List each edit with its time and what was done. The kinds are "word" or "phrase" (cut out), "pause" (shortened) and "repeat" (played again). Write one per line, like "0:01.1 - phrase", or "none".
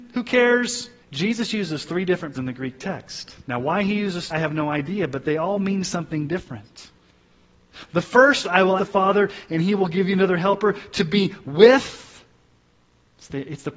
0:01.0 - pause
0:02.3 - word
0:03.4 - pause
0:04.3 - word
0:08.4 - phrase
0:08.8 - word

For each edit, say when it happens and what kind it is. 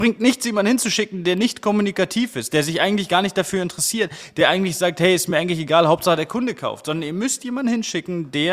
none

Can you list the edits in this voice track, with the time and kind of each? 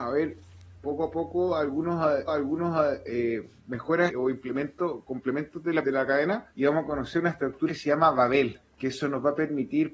0:02.3 - repeat
0:04.1 - word
0:05.8 - word
0:06.5 - pause
0:07.7 - phrase
0:08.6 - pause

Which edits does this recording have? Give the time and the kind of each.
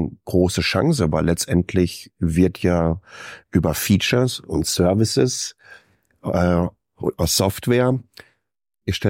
none

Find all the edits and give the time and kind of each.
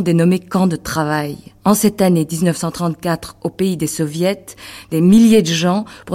0:01.6 - pause

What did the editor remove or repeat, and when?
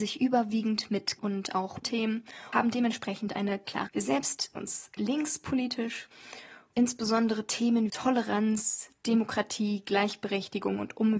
0:01.2 - word
0:01.8 - word
0:02.5 - word
0:03.9 - word
0:04.6 - word
0:06.7 - word
0:07.9 - word

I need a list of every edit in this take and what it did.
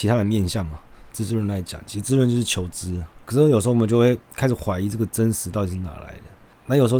0:03.2 - pause
0:04.2 - pause

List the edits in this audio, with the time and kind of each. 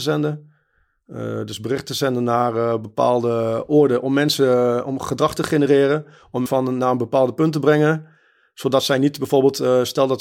0:06.5 - word

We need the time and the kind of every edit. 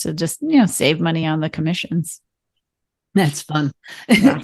none

